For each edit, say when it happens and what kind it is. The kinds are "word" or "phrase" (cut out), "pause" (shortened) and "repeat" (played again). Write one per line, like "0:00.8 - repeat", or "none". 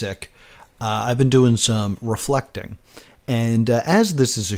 none

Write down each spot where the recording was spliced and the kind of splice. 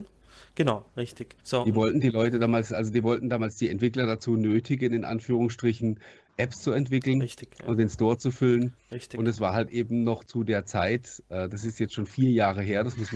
0:01.4 - pause

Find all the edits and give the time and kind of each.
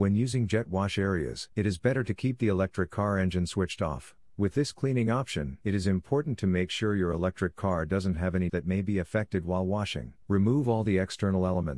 0:01.5 - pause
0:04.3 - pause
0:05.6 - pause
0:08.5 - word
0:10.2 - pause

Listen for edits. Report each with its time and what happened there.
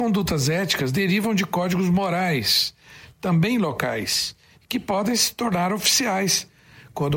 none

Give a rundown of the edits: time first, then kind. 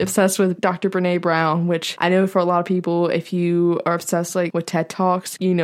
none

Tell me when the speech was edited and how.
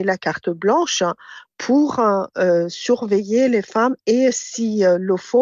none

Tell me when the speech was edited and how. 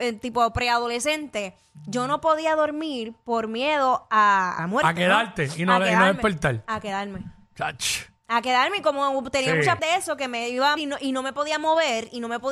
0:04.6 - phrase
0:09.8 - word
0:10.8 - word

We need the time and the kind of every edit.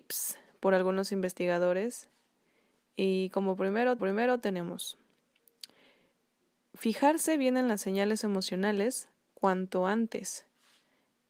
0:04.0 - repeat

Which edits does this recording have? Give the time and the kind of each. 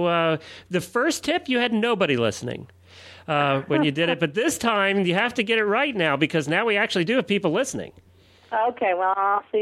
none

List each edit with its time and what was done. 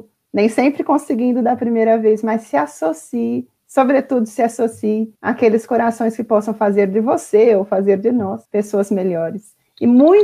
0:03.6 - pause
0:05.2 - pause
0:08.5 - pause

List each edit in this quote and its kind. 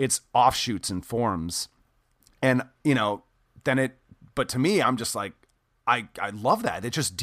none

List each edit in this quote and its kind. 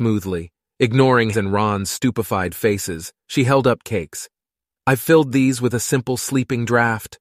0:01.3 - word
0:03.2 - pause
0:03.8 - phrase

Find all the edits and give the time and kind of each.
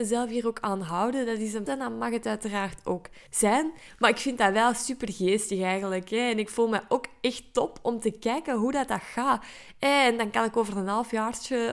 0:01.7 - word
0:03.3 - pause

